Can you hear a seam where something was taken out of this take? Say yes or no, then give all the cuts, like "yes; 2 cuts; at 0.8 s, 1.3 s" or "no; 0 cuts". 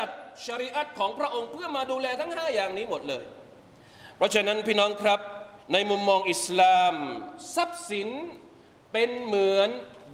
yes; 1 cut; at 5.6 s